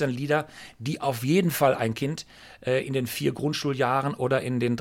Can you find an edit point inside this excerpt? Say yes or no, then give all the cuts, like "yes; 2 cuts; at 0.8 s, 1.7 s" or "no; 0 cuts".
no; 0 cuts